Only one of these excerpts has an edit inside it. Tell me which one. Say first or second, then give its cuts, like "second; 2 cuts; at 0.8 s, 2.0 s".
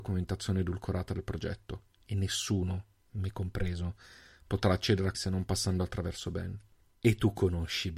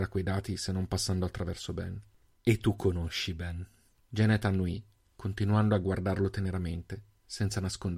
first; 1 cut; at 5.1 s